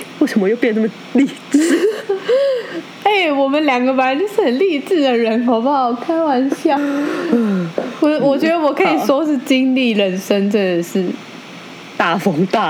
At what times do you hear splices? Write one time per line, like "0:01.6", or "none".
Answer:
0:06.8